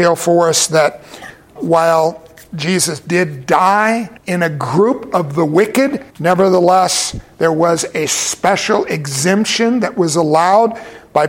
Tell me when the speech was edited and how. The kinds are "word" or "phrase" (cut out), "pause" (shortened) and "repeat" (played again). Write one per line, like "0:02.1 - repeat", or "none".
0:01.6 - word
0:04.2 - pause
0:06.1 - pause